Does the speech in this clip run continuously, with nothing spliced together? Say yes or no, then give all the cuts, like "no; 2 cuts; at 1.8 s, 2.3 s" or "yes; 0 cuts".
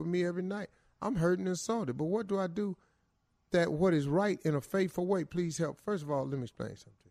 yes; 0 cuts